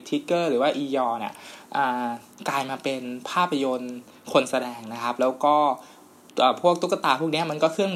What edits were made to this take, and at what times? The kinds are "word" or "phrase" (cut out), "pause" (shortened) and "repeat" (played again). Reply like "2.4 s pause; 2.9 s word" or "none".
none